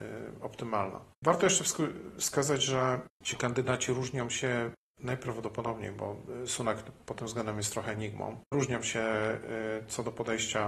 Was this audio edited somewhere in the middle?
yes; 3 cuts; at 1.1 s, 3.1 s, 8.5 s

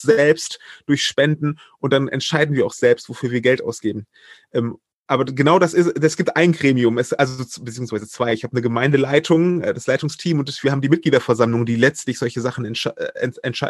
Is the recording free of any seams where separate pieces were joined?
yes; 0 cuts

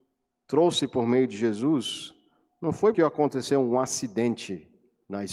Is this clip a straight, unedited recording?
no; 1 cut; at 2.9 s

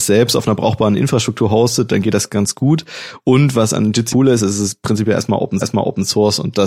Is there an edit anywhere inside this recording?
yes; 2 cuts; at 4.1 s, 5.6 s

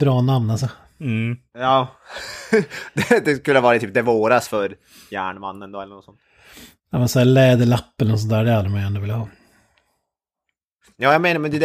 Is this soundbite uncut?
yes; 0 cuts

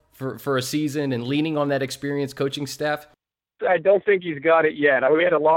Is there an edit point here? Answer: yes; 1 cut; at 3.6 s

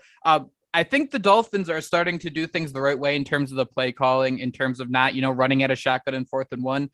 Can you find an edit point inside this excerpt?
no; 0 cuts

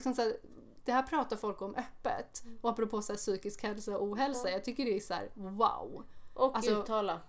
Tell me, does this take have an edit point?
no; 0 cuts

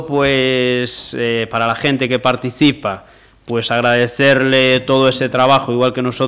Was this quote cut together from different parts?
no; 0 cuts

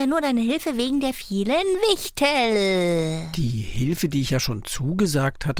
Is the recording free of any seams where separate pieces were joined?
yes; 0 cuts

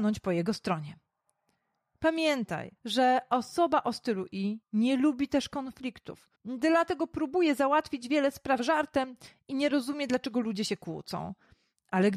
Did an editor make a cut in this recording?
yes; 3 cuts; at 2.8 s, 4.6 s, 6.4 s

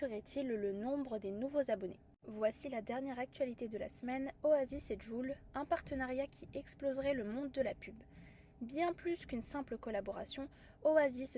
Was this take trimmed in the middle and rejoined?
no; 0 cuts

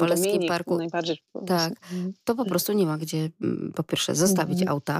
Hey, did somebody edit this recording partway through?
no; 0 cuts

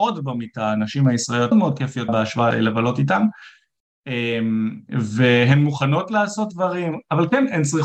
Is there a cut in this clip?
yes; 3 cuts; at 1.5 s, 2.1 s, 2.5 s

